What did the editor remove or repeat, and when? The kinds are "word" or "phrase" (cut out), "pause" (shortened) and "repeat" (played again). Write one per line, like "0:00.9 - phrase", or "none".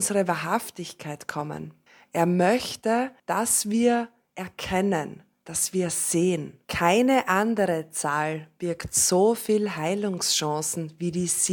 0:01.9 - pause
0:03.2 - pause
0:06.6 - pause